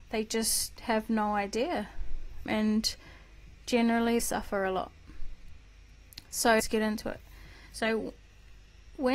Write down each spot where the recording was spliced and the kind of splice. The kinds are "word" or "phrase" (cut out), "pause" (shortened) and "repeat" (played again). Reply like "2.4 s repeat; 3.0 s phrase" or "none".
2.5 s word; 4.2 s word; 6.6 s word